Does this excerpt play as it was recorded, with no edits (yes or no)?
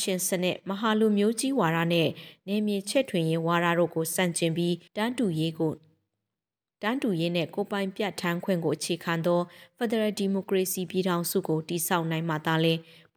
no